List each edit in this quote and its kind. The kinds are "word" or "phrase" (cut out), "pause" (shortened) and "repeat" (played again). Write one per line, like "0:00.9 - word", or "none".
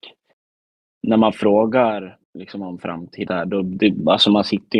0:02.2 - pause
0:03.3 - phrase